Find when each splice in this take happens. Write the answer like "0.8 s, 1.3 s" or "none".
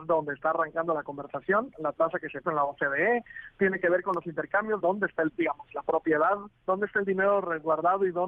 1.7 s, 2.4 s, 4.8 s, 5.3 s, 6.6 s